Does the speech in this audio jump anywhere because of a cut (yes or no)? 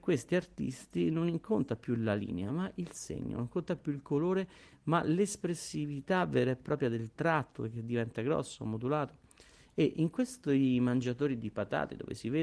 no